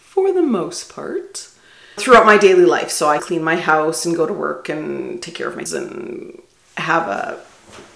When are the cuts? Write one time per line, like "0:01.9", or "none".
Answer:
0:02.0
0:03.2
0:05.7